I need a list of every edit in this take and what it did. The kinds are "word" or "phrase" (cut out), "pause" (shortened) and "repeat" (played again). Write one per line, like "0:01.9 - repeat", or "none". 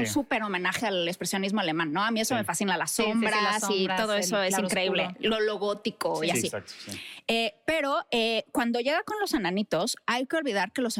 none